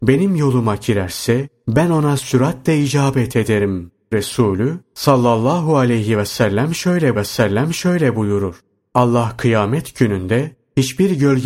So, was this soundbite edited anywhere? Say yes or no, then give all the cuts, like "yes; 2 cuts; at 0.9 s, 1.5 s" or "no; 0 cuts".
yes; 2 cuts; at 4.1 s, 7.2 s